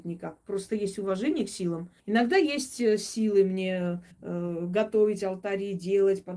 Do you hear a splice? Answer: yes; 2 cuts; at 2.0 s, 4.1 s

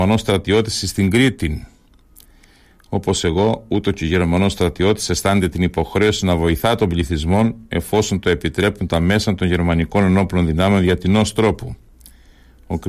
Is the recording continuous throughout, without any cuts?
yes; 0 cuts

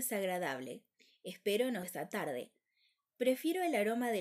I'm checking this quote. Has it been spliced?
yes; 1 cut; at 1.8 s

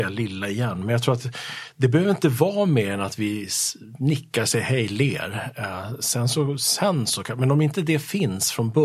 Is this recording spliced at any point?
no; 0 cuts

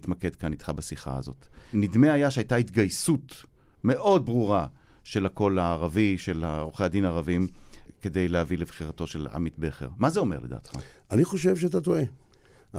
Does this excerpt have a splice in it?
no; 0 cuts

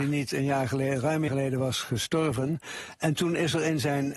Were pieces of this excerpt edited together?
yes; 1 cut; at 1.3 s

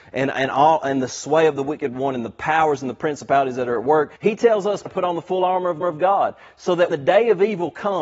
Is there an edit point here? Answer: yes; 4 cuts; at 4.2 s, 4.9 s, 5.8 s, 6.9 s

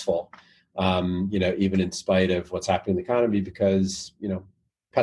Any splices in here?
no; 0 cuts

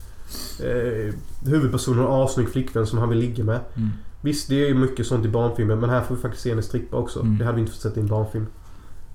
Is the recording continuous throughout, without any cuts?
yes; 0 cuts

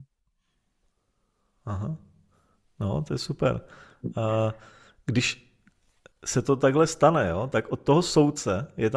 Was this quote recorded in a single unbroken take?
yes; 0 cuts

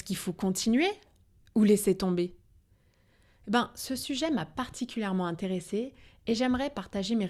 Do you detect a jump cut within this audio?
no; 0 cuts

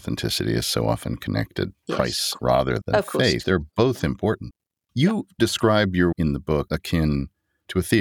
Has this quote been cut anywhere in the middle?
yes; 6 cuts; at 1.7 s, 2.4 s, 2.8 s, 3.4 s, 6.1 s, 6.7 s

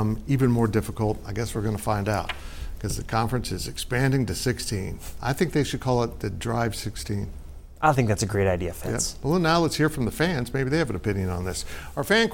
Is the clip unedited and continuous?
yes; 0 cuts

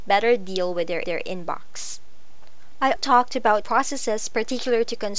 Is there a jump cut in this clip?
yes; 3 cuts; at 1.0 s, 2.9 s, 3.6 s

